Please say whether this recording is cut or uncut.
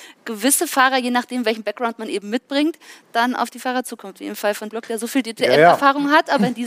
cut